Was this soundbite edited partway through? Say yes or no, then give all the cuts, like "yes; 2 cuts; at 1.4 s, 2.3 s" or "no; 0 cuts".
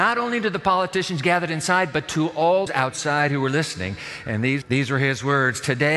yes; 2 cuts; at 2.7 s, 4.6 s